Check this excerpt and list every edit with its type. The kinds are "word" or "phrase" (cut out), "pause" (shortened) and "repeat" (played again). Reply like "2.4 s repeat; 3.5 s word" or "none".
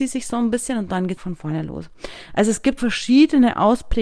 1.2 s word; 2.8 s word

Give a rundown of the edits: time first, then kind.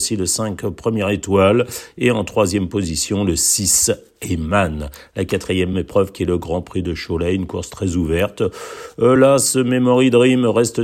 none

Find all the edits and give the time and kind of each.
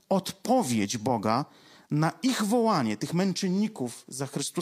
none

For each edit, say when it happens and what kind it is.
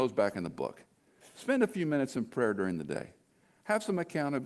none

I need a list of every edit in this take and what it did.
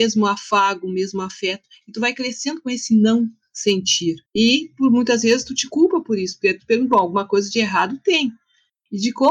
4.3 s pause

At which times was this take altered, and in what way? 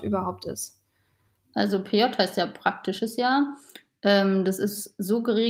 none

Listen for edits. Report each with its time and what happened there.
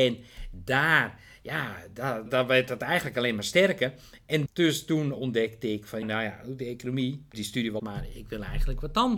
2.3 s word; 4.5 s word; 6.0 s word; 7.3 s word; 7.8 s word

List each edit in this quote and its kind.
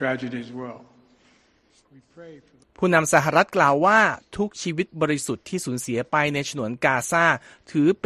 2.6 s pause

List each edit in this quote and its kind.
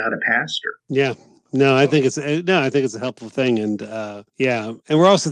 none

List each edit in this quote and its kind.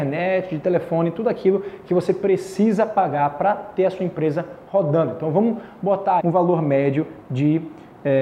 6.2 s word

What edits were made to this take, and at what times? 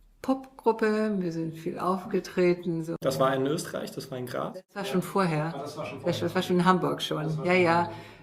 none

